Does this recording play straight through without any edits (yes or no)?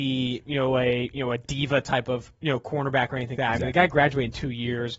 no